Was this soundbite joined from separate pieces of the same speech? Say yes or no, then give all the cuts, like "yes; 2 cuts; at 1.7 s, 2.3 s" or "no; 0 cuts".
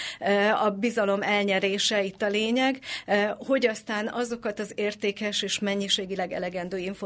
no; 0 cuts